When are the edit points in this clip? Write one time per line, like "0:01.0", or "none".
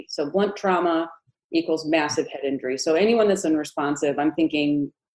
0:03.4